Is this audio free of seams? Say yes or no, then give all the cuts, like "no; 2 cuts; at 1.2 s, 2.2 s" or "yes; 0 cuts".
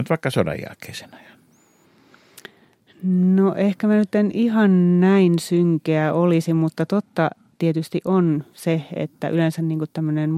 yes; 0 cuts